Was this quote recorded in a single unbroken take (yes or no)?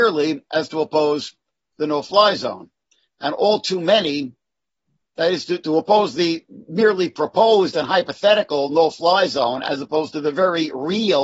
yes